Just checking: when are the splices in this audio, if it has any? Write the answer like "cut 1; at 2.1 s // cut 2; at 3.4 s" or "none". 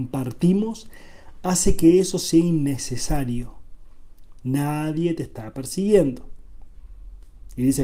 none